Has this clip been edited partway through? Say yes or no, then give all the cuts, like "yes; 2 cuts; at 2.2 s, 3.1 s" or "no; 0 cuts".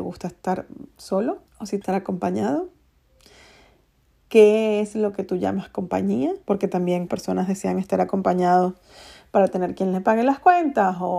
yes; 4 cuts; at 1.5 s, 1.8 s, 6.4 s, 7.1 s